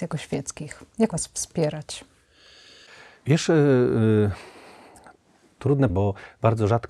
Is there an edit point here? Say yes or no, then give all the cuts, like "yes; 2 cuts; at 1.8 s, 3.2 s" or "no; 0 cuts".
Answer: yes; 2 cuts; at 1.1 s, 5.9 s